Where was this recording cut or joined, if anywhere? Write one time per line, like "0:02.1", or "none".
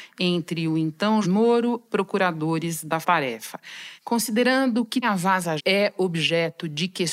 0:01.2
0:01.9
0:03.0
0:05.0
0:05.6